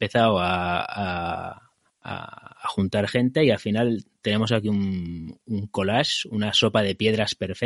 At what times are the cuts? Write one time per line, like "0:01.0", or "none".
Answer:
none